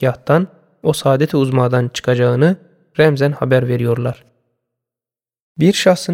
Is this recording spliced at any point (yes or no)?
no